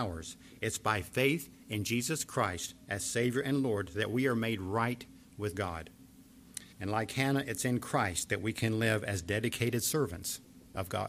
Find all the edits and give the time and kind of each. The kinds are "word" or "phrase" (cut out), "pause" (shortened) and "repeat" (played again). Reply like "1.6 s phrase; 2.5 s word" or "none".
6.7 s pause